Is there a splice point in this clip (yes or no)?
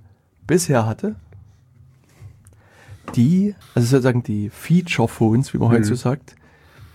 yes